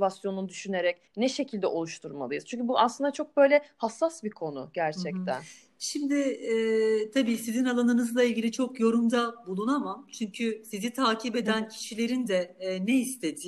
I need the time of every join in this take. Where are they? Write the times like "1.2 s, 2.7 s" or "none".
1.1 s